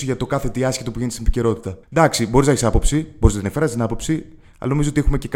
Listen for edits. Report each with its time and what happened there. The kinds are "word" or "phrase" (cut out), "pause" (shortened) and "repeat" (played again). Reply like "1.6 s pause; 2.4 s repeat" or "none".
1.8 s pause